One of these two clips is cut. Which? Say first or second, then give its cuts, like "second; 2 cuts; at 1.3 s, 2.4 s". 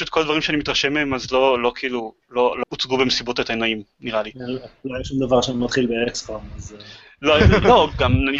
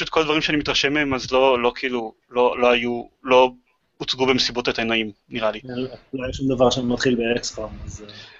first; 1 cut; at 2.6 s